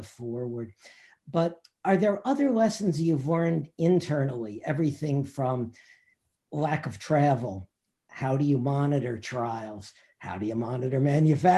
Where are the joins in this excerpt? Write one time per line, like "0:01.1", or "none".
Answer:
none